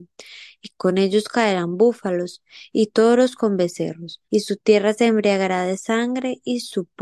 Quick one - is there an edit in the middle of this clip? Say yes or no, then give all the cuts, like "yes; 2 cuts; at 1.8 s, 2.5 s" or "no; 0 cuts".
yes; 1 cut; at 4.2 s